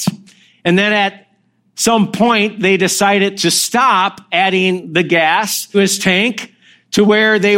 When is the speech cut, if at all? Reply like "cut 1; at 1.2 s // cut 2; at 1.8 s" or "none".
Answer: cut 1; at 5.7 s